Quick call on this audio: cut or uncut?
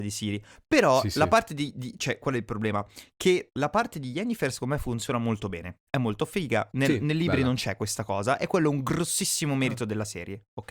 cut